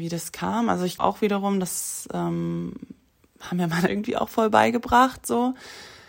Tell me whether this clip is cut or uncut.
cut